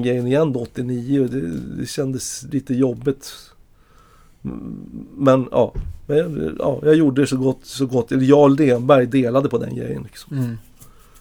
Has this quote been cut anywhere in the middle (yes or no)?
no